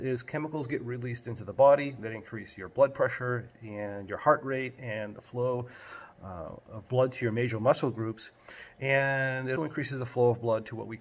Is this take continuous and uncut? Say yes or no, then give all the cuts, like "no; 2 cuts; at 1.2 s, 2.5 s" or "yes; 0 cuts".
no; 1 cut; at 9.6 s